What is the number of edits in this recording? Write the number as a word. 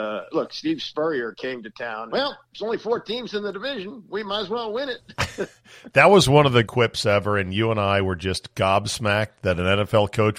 two